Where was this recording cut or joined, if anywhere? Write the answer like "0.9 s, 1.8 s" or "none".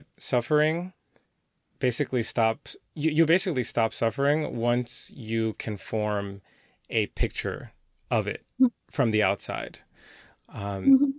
none